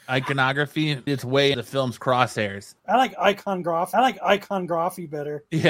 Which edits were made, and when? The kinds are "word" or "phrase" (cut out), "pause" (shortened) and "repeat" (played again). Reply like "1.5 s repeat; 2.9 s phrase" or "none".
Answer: 1.1 s word; 1.5 s word; 2.8 s pause; 3.9 s repeat